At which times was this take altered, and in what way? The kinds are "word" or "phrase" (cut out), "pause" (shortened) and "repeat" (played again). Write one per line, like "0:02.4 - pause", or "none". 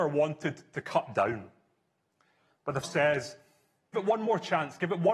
0:02.8 - word
0:03.9 - word